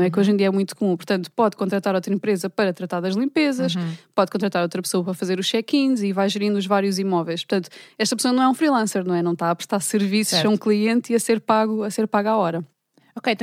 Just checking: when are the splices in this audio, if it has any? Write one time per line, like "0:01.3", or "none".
none